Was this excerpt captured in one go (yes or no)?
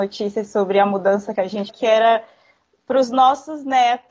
no